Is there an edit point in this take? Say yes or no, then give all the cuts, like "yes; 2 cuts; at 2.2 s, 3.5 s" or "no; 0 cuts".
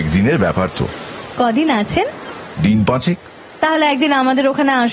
no; 0 cuts